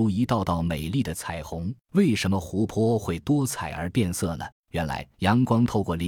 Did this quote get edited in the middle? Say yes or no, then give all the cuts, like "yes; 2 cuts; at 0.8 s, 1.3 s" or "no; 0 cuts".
yes; 3 cuts; at 1.8 s, 4.5 s, 5.1 s